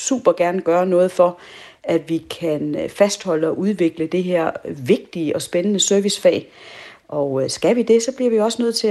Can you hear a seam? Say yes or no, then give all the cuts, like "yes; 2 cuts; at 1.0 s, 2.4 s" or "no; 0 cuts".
no; 0 cuts